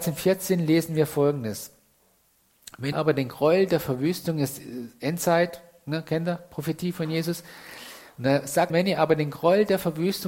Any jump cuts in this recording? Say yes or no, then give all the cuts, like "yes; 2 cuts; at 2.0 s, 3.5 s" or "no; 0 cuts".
yes; 2 cuts; at 2.9 s, 8.7 s